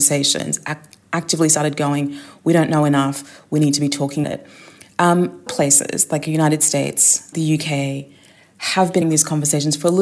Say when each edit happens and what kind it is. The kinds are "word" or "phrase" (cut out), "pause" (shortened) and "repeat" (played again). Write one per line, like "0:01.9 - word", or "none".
0:04.2 - word
0:05.5 - word
0:07.3 - word
0:09.0 - word